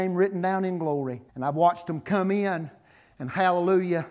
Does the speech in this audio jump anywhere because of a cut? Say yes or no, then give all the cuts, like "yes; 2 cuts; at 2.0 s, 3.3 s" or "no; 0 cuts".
yes; 1 cut; at 1.3 s